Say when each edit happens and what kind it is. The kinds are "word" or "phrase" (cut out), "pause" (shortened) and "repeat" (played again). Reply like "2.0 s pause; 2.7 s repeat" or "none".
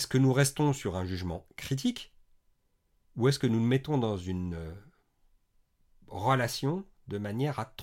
none

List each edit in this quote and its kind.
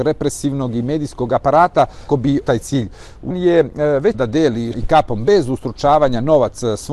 2.1 s word; 2.4 s word; 3.3 s phrase; 4.1 s word; 4.7 s word

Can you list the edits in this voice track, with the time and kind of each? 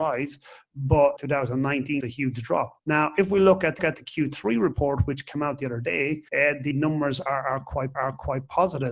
1.2 s phrase; 2.0 s phrase; 2.8 s pause; 3.8 s repeat; 6.3 s pause; 6.7 s word; 7.9 s repeat

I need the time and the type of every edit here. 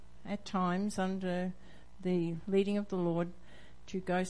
none

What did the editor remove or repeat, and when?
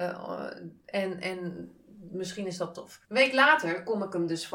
3.0 s pause

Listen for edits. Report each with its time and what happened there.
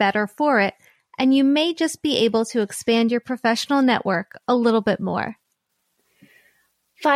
none

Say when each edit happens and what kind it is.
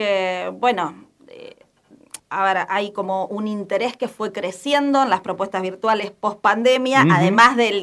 2.2 s pause

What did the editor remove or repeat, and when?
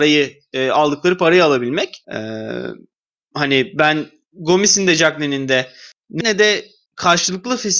2.0 s pause; 6.2 s word

